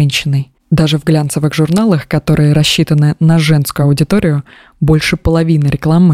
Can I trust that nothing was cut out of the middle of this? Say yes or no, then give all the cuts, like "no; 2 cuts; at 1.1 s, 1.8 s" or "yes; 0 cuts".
yes; 0 cuts